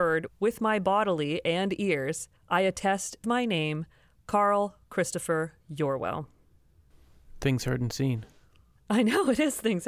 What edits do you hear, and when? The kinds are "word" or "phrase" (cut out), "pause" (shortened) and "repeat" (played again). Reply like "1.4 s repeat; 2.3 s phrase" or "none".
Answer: 2.4 s pause; 3.2 s phrase